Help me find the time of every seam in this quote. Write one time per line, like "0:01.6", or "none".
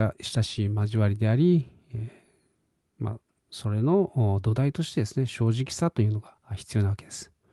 0:06.4